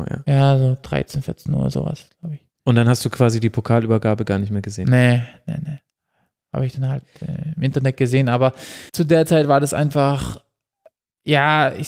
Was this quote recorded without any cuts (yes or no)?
no